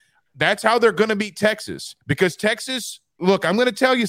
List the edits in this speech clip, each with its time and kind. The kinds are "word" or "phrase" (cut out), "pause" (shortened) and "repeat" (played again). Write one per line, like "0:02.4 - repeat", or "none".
0:02.0 - pause